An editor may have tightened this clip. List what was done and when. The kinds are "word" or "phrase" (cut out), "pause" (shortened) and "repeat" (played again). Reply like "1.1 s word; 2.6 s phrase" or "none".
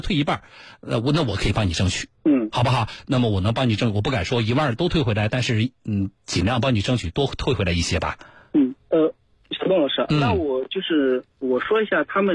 2.2 s pause; 8.8 s pause